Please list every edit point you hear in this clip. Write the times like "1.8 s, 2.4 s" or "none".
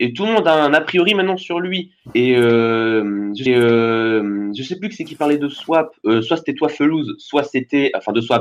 3.5 s